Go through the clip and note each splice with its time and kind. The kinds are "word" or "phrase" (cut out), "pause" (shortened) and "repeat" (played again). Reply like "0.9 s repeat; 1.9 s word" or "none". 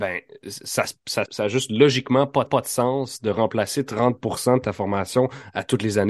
1.3 s word; 2.5 s repeat

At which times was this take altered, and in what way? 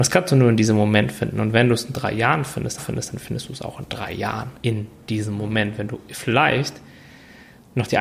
2.8 s repeat; 4.6 s pause

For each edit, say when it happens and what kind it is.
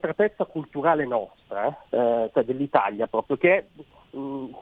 1.9 s pause

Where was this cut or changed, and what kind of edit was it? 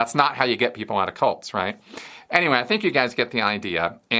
none

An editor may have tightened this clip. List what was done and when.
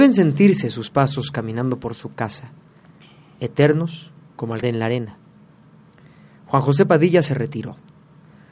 4.6 s word

